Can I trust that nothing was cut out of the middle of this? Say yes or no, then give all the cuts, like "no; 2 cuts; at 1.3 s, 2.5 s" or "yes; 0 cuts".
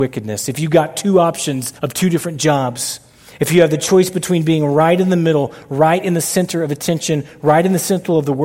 no; 1 cut; at 1.8 s